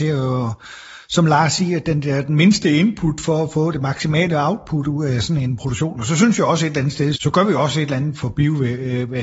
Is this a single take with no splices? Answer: no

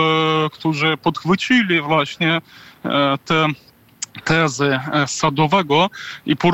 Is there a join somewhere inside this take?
no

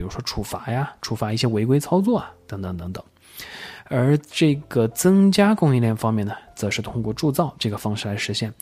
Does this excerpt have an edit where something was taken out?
yes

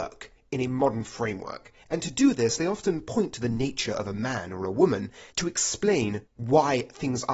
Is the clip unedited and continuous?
no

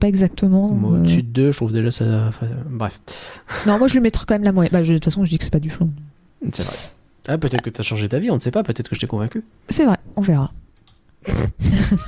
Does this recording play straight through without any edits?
yes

